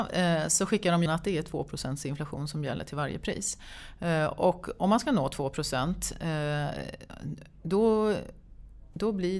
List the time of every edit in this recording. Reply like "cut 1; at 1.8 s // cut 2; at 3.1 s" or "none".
cut 1; at 1.1 s